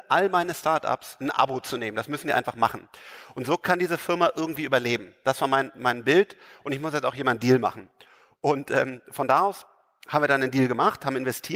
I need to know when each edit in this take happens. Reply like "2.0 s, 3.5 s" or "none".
none